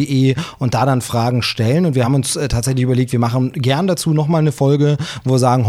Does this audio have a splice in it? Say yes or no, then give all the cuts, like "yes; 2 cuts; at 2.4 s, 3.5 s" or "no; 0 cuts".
no; 0 cuts